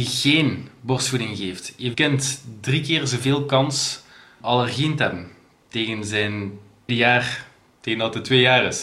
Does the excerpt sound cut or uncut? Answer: cut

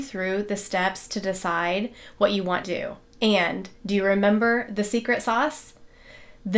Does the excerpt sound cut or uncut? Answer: cut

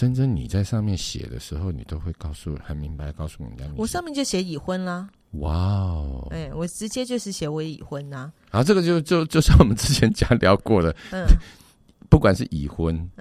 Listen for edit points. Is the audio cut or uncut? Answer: uncut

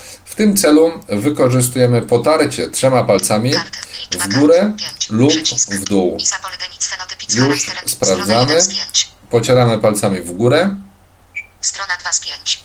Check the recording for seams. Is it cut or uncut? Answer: uncut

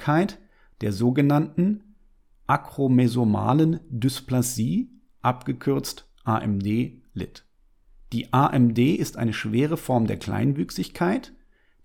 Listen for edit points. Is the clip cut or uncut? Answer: uncut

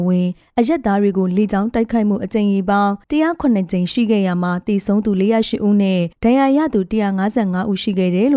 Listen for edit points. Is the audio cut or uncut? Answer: cut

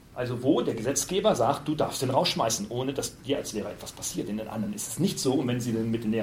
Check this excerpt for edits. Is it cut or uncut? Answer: uncut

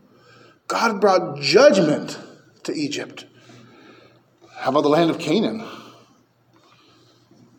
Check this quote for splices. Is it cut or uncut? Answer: uncut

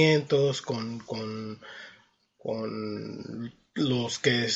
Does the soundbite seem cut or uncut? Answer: uncut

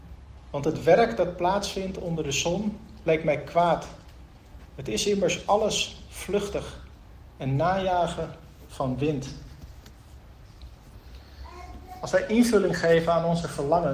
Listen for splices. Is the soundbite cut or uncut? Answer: uncut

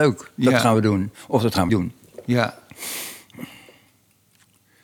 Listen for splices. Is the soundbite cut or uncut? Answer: cut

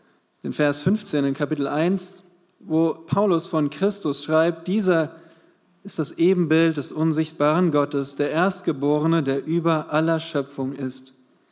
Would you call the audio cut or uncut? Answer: uncut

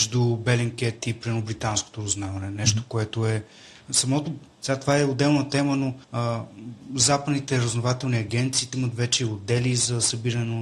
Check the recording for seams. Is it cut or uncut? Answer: cut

